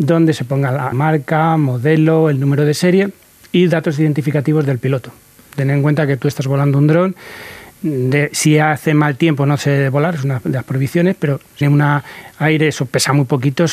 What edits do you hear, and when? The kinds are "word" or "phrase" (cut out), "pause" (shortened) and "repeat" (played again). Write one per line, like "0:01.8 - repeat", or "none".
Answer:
0:00.9 - word
0:11.6 - word